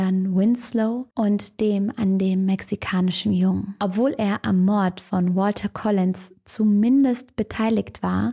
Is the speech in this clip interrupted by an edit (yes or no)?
yes